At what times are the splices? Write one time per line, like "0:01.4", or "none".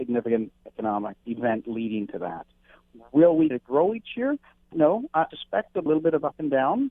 0:01.2
0:03.5
0:04.7
0:05.3
0:05.9